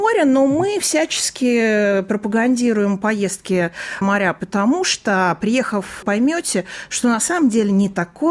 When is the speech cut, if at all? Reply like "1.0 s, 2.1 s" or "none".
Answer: 4.0 s, 6.0 s